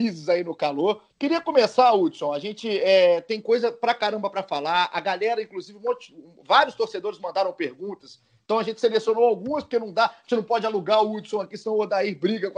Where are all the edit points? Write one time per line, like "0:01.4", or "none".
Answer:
0:01.1